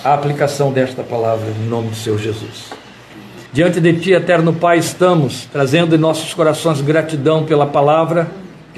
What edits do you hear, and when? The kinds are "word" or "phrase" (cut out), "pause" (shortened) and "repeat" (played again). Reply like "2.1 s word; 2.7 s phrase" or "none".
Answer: 3.5 s pause